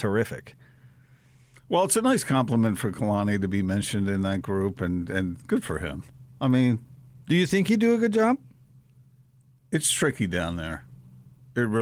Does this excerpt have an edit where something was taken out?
no; 0 cuts

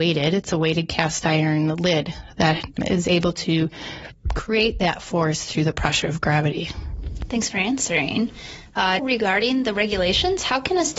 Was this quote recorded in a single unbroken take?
no; 2 cuts; at 2.8 s, 9.0 s

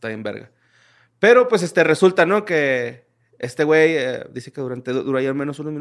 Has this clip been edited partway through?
no; 0 cuts

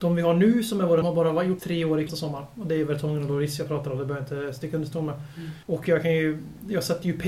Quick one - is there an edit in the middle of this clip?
yes; 4 cuts; at 1.0 s, 1.6 s, 2.1 s, 5.6 s

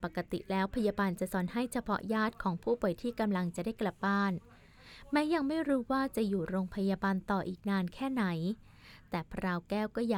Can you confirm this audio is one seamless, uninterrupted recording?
yes; 0 cuts

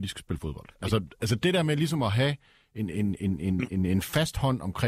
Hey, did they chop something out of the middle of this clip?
no; 0 cuts

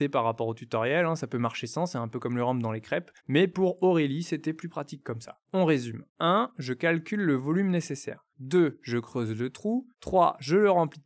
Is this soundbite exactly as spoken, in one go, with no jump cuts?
no; 4 cuts; at 3.2 s, 6.1 s, 8.3 s, 9.9 s

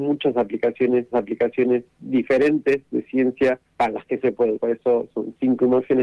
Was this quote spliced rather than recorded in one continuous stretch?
yes; 3 cuts; at 1.1 s, 3.7 s, 4.5 s

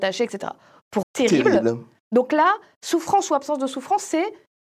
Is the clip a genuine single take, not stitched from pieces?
no; 1 cut; at 1.0 s

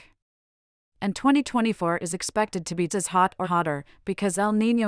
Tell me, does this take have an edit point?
yes; 2 cuts; at 2.9 s, 3.4 s

